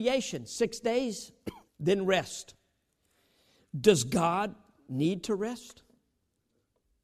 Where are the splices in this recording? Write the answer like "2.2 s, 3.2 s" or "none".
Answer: 1.7 s

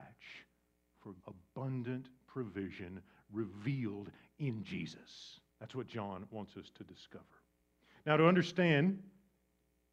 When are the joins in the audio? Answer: 1.2 s, 5.5 s

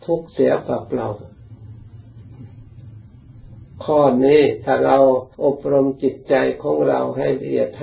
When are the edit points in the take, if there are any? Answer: 5.3 s

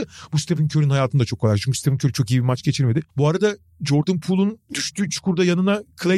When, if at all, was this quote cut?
3.1 s

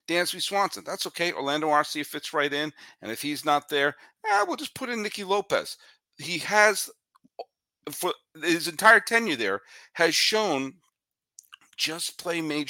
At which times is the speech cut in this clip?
none

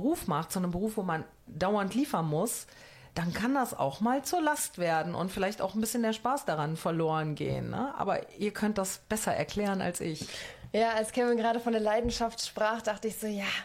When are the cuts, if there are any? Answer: 3.1 s

